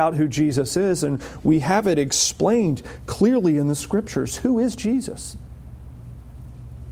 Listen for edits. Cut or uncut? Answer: uncut